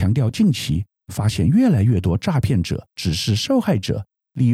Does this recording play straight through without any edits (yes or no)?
no